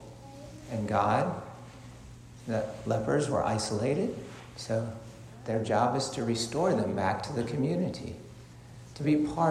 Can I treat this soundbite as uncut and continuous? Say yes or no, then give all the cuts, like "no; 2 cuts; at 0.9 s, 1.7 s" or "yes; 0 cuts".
yes; 0 cuts